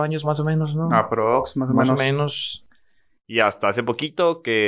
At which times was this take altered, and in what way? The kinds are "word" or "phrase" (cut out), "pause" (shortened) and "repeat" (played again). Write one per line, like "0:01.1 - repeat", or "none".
none